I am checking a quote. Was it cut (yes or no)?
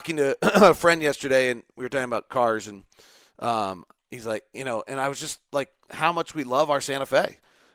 no